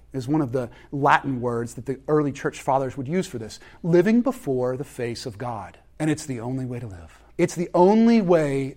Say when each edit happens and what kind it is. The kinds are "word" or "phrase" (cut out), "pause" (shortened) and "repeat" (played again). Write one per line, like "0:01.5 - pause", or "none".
0:05.9 - pause
0:07.3 - pause

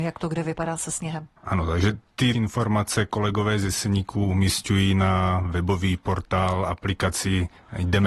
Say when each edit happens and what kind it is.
0:02.3 - word

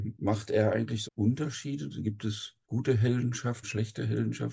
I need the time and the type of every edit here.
0:01.0 - word
0:02.6 - pause
0:03.6 - word

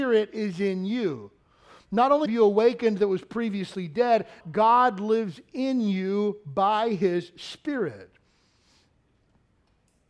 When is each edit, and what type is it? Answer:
0:02.3 - phrase
0:04.4 - word

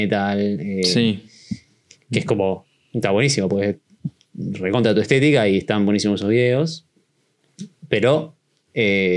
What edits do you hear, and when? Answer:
none

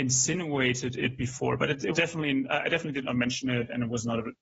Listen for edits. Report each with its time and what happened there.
0:01.9 - word

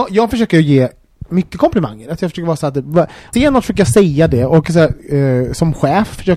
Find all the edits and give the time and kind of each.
0:03.3 - word

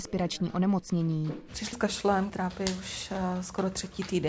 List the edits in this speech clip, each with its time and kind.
0:01.7 - word
0:02.3 - word

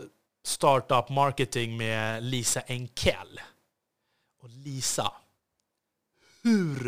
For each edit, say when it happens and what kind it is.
none

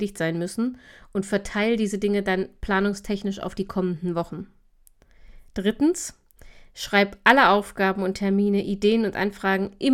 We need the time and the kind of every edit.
none

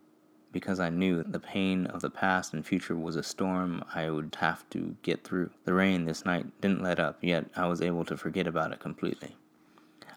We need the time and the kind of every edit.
0:01.2 - word
0:04.3 - word
0:05.6 - pause

